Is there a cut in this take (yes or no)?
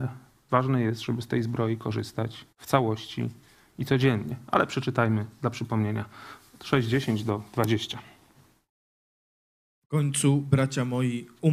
yes